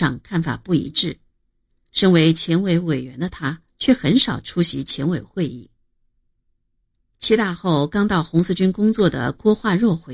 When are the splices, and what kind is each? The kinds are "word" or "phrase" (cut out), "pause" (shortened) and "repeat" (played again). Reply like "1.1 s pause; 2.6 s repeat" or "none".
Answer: none